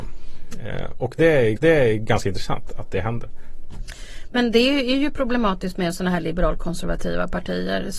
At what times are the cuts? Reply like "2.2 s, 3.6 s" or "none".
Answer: 1.6 s